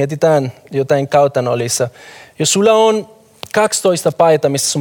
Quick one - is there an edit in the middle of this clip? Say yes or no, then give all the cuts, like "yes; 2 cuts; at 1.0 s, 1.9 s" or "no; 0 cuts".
no; 0 cuts